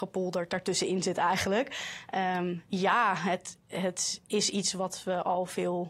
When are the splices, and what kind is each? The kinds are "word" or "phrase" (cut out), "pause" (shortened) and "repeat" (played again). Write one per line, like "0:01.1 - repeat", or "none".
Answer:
0:02.7 - pause
0:04.3 - pause